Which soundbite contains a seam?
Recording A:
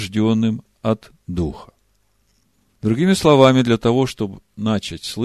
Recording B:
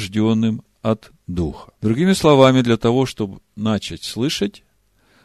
B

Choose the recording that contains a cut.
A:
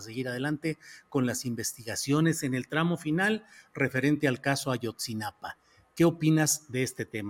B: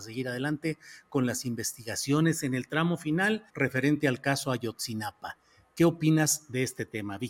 B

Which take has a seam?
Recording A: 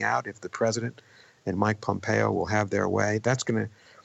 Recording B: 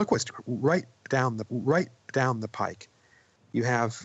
B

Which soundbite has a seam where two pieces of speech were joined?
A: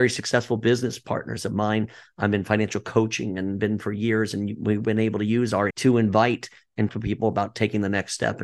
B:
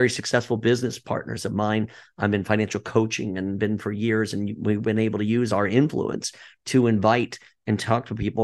A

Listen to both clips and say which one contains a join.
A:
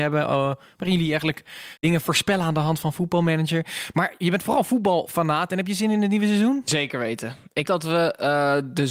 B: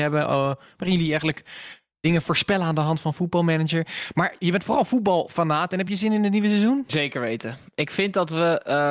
A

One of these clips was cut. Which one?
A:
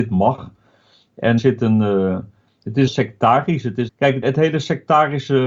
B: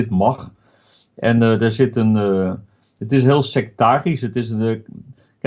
A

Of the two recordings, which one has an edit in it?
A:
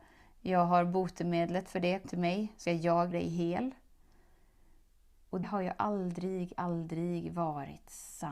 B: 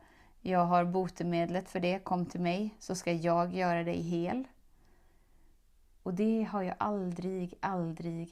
A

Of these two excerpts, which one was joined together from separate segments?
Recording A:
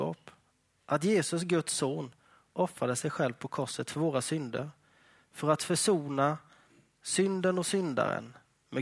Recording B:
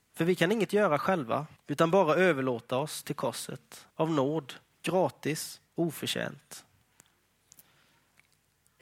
B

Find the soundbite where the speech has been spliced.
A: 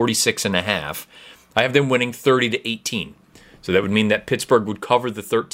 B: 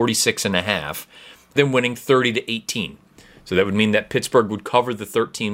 B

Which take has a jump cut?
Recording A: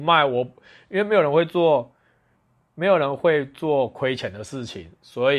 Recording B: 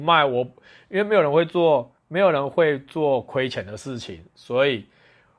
B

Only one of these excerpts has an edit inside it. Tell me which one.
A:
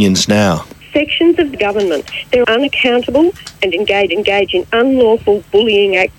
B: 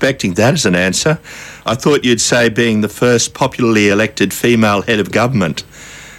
A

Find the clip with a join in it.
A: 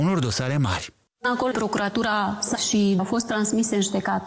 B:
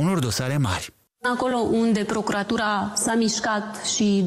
A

